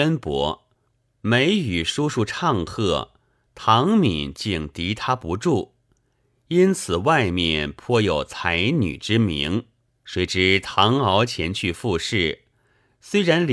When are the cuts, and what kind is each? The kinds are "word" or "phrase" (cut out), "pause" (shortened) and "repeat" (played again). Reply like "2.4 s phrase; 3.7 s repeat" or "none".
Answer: 9.9 s pause